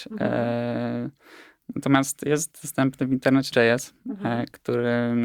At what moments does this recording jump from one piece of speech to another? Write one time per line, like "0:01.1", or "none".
0:03.5